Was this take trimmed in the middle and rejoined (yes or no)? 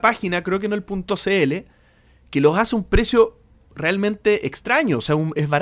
no